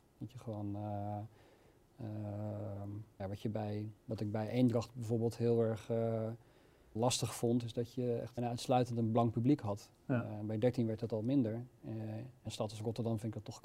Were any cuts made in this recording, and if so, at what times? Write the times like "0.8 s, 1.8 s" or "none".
3.2 s, 7.0 s, 8.4 s, 12.5 s